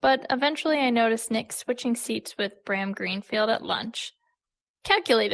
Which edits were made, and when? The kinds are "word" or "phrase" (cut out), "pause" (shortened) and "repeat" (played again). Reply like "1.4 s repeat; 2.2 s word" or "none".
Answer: none